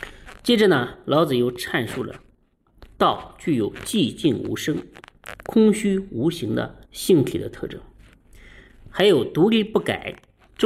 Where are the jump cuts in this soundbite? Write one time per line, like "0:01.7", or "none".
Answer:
0:06.8